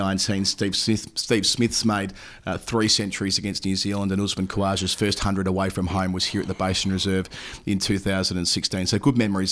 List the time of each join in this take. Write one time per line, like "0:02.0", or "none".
none